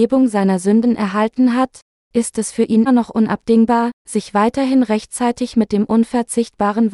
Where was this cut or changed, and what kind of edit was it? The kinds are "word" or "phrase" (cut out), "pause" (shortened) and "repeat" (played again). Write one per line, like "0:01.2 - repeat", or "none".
0:01.9 - pause
0:02.9 - word
0:04.0 - pause